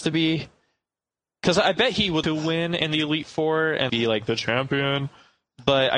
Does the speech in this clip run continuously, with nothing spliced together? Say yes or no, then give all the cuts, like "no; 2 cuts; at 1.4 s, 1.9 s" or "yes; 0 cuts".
no; 2 cuts; at 2.2 s, 3.9 s